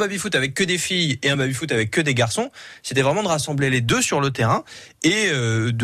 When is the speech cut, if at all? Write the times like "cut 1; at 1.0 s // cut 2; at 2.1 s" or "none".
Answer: none